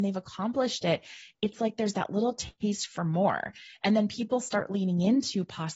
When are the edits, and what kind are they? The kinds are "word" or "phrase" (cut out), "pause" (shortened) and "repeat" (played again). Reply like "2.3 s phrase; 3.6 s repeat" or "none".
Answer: none